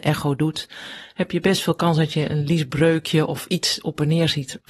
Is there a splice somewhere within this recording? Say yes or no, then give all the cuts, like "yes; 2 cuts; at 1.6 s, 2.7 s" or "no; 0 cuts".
no; 0 cuts